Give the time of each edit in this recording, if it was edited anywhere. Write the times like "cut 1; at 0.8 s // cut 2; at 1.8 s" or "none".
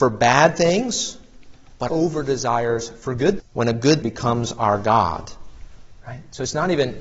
cut 1; at 1.9 s // cut 2; at 3.4 s // cut 3; at 4.0 s